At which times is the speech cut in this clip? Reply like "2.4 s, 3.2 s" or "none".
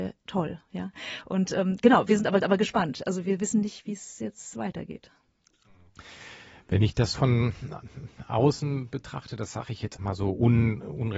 2.4 s, 7.1 s, 10.0 s